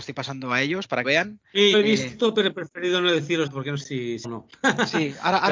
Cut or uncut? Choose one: cut